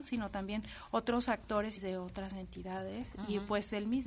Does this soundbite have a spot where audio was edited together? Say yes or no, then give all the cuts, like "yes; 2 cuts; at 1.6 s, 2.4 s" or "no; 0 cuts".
yes; 1 cut; at 1.8 s